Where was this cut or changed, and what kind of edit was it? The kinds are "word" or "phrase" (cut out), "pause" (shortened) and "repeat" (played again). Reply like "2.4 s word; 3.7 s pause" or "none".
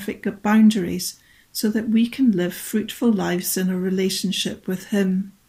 none